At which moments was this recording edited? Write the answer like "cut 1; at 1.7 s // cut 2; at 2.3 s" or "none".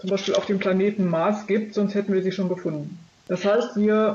none